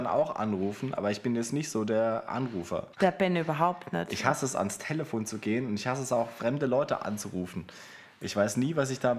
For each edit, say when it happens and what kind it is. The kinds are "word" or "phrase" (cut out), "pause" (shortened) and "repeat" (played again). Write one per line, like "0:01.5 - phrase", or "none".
0:02.9 - pause